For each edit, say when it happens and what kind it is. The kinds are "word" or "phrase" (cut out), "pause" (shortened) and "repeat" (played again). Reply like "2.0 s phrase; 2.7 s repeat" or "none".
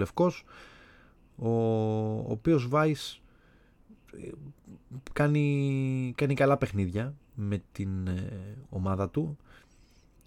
none